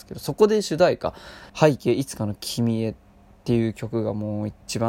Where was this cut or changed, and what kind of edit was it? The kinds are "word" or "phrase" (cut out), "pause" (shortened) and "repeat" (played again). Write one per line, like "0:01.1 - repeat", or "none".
0:01.5 - pause